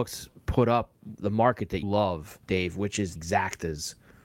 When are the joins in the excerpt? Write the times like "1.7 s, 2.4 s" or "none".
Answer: 1.2 s, 1.8 s, 2.4 s, 3.2 s